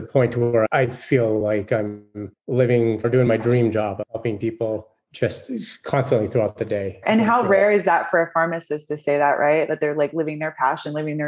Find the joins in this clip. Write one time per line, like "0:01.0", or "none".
none

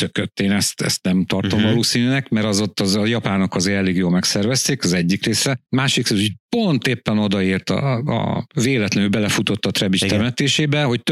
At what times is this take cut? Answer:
0:05.7

